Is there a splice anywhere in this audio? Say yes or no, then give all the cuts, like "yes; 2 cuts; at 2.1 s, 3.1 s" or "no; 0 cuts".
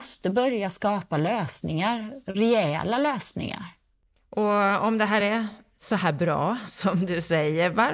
no; 0 cuts